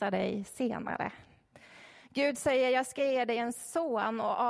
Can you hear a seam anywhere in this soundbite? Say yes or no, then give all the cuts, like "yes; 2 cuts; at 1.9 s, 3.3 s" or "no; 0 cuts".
no; 0 cuts